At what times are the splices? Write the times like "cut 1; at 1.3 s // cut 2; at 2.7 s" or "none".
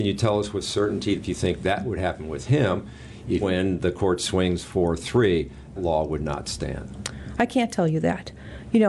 cut 1; at 1.2 s // cut 2; at 3.4 s // cut 3; at 5.8 s